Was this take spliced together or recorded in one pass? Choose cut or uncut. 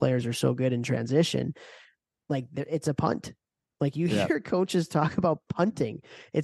uncut